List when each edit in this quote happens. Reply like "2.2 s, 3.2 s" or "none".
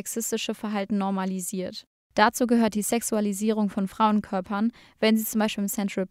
none